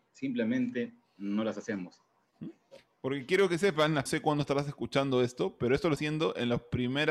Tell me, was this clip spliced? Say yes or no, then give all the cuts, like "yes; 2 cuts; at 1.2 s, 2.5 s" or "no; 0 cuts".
yes; 2 cuts; at 4.1 s, 6.0 s